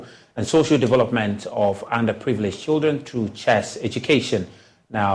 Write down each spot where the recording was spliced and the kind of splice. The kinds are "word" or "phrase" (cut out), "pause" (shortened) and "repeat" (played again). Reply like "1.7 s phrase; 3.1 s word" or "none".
none

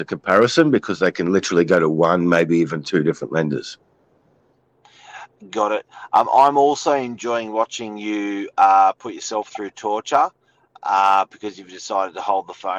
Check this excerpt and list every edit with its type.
none

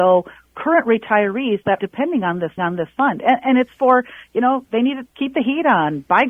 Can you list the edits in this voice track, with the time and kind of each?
1.8 s word; 2.6 s repeat; 5.1 s word

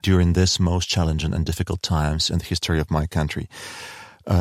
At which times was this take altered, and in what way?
none

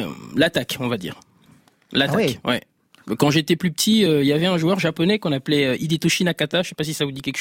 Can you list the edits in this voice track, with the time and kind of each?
none

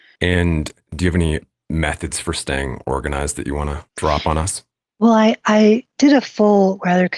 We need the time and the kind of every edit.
3.9 s pause

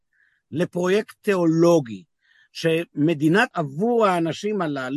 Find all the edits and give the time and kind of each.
3.5 s word

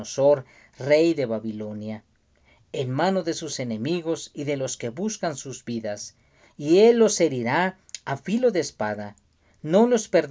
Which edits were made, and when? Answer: none

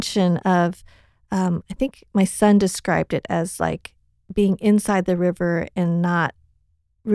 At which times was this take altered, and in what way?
none

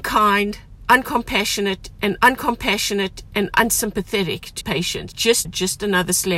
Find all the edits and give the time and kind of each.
2.2 s repeat; 4.6 s word; 5.1 s word; 5.4 s phrase

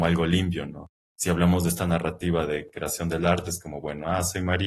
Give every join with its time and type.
none

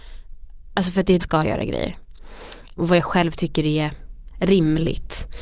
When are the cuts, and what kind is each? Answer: 1.2 s phrase

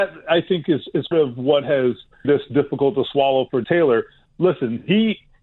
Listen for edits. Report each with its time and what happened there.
1.1 s word; 2.2 s word; 3.6 s word

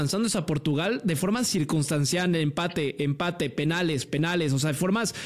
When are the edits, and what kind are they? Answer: none

